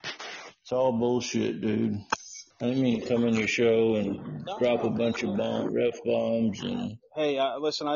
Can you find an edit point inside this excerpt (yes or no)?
yes